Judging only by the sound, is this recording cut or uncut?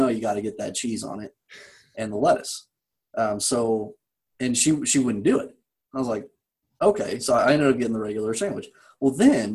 uncut